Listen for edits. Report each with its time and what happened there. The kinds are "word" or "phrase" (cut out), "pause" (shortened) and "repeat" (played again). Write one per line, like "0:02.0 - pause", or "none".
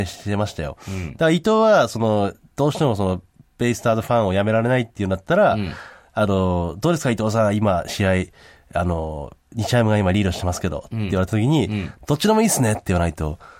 none